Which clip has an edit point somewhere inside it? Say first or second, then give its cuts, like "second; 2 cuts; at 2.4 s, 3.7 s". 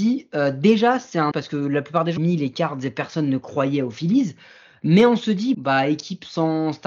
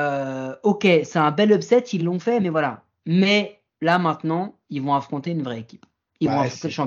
first; 3 cuts; at 1.3 s, 2.2 s, 5.5 s